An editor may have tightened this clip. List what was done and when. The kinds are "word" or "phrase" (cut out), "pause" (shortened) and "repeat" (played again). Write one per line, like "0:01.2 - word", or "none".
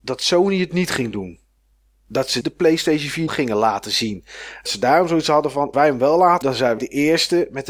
0:02.4 - word
0:03.3 - word
0:04.7 - word
0:05.7 - word
0:06.4 - word
0:06.8 - word